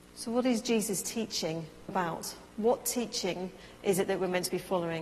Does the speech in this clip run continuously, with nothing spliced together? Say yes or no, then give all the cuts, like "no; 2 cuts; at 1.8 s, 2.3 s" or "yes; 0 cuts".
no; 2 cuts; at 1.9 s, 2.5 s